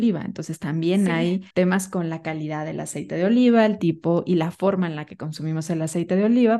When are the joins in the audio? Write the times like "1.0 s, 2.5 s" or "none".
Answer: 1.5 s